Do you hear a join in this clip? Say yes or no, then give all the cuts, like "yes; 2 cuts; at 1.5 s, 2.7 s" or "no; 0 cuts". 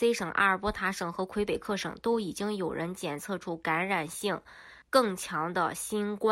yes; 1 cut; at 4.8 s